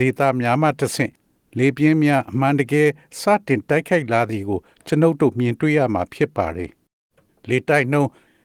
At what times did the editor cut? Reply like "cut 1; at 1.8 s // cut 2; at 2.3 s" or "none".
none